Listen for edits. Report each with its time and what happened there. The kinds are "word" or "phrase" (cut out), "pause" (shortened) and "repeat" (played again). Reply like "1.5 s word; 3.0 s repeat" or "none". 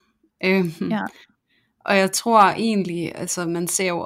none